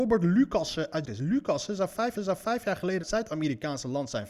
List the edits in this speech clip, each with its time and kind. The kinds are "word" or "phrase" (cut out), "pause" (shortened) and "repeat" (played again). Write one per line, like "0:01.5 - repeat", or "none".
0:01.0 - word
0:02.2 - repeat
0:03.0 - phrase